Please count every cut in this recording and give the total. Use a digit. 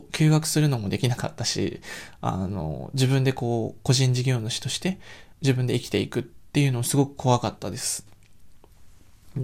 1